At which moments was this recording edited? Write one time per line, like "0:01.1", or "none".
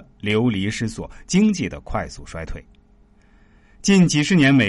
none